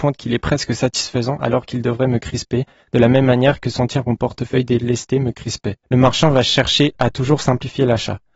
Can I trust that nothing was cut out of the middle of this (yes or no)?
no